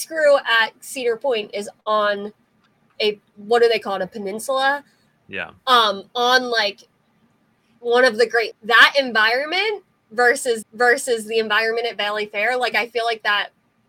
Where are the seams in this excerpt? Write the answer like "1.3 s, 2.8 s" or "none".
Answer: 3.2 s, 5.6 s, 8.5 s, 10.6 s